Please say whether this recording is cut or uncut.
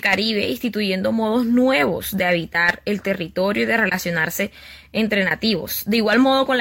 uncut